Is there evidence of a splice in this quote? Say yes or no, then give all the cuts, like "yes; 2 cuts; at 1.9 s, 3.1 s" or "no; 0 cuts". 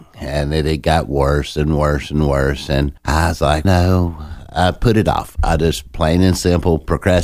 yes; 2 cuts; at 3.0 s, 3.6 s